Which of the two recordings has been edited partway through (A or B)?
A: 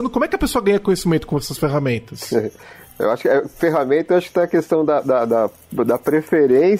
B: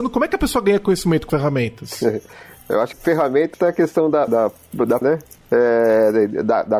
B